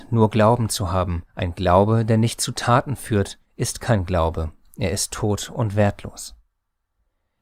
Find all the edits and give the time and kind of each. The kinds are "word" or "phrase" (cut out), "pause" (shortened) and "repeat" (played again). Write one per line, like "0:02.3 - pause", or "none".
0:01.3 - pause
0:03.5 - pause